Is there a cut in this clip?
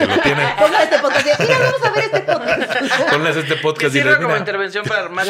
no; 0 cuts

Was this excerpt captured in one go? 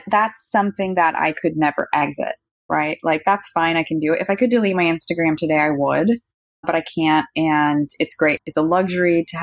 yes; 0 cuts

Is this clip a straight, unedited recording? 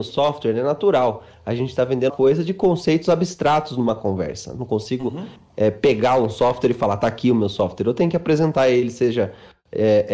no; 1 cut; at 2.1 s

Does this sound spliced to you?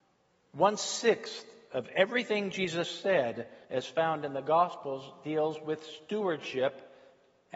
yes; 1 cut; at 3.6 s

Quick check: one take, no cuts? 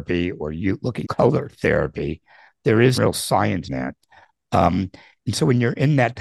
no; 3 cuts; at 1.0 s, 3.0 s, 3.7 s

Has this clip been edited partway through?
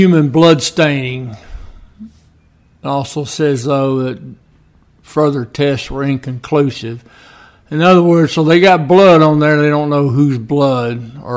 no; 0 cuts

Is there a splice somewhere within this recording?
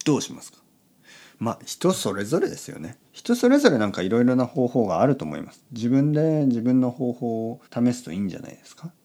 yes; 2 cuts; at 3.1 s, 7.7 s

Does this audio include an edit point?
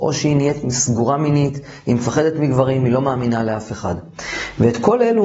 no; 0 cuts

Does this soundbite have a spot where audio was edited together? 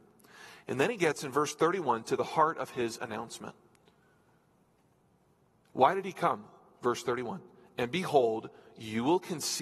no; 0 cuts

